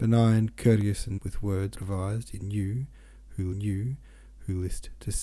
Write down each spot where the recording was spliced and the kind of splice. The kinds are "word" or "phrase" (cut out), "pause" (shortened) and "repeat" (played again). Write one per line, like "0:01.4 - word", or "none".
0:01.2 - word
0:01.7 - word
0:03.5 - repeat